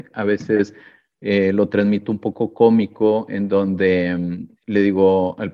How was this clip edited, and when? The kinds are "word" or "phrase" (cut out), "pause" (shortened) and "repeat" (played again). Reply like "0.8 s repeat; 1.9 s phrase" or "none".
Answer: none